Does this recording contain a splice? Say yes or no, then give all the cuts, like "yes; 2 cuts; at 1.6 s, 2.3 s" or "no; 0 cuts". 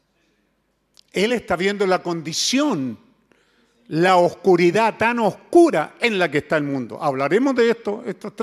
no; 0 cuts